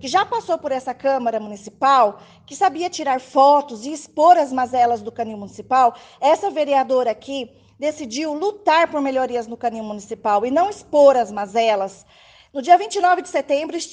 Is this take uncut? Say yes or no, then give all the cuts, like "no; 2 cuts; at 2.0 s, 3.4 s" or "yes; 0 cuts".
yes; 0 cuts